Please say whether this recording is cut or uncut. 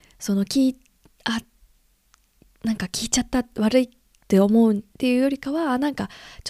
cut